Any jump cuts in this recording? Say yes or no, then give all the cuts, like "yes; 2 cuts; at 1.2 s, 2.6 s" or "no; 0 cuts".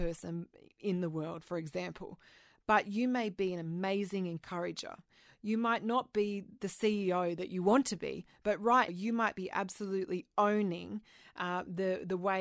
yes; 1 cut; at 8.9 s